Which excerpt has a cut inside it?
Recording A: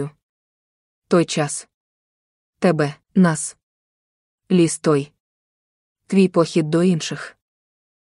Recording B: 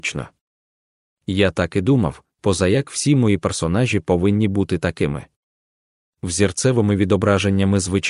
A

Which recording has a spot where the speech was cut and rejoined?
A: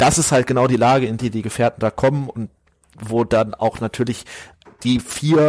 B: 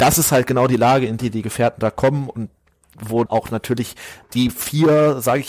B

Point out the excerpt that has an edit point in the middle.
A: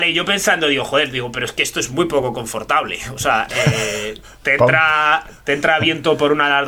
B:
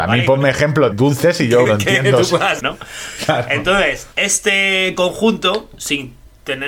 B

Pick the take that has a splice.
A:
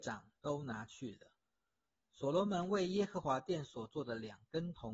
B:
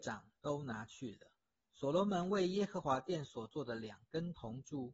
B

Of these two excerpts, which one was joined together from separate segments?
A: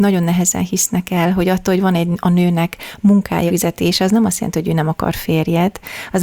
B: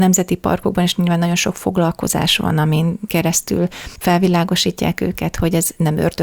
A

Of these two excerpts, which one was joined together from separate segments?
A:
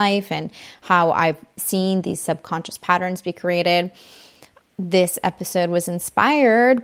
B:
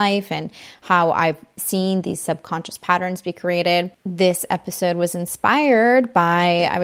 B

